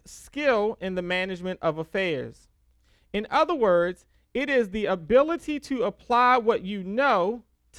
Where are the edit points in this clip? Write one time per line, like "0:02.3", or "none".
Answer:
none